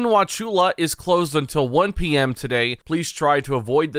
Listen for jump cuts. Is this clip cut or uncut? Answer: cut